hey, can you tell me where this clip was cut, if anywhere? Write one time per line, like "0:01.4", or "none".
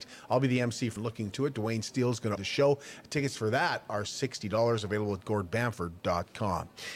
0:01.0
0:01.3
0:02.4